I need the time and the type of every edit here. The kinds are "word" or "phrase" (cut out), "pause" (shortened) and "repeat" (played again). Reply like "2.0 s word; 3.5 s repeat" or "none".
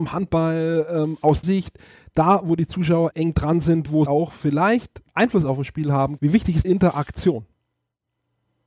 1.4 s word; 3.1 s word; 4.1 s word; 6.2 s word; 6.6 s word